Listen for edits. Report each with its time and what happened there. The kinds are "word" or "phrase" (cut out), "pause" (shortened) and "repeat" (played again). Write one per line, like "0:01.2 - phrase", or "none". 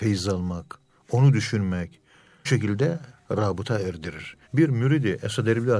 0:02.4 - word
0:04.4 - pause